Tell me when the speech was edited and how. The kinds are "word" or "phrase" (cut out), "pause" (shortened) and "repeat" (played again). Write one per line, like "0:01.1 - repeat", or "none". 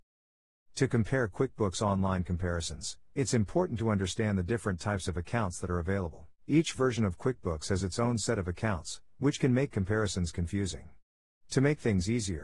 0:06.4 - pause